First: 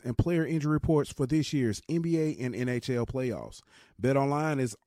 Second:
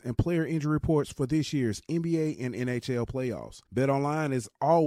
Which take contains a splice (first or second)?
second